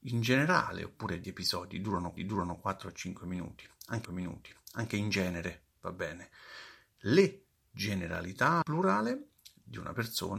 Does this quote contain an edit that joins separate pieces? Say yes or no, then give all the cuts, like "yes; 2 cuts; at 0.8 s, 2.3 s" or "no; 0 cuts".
yes; 4 cuts; at 1.2 s, 2.2 s, 4.0 s, 8.6 s